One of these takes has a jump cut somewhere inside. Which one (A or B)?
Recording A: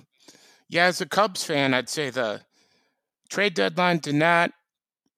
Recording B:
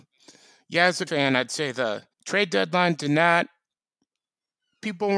B